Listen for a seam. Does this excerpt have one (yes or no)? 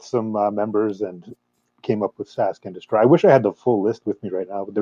no